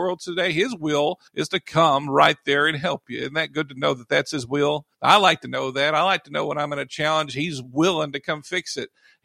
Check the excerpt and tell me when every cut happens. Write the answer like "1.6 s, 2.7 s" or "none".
1.3 s, 4.9 s